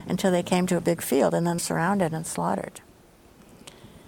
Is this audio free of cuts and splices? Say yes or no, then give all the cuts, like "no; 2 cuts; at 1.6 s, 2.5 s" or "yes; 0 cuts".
no; 1 cut; at 1.6 s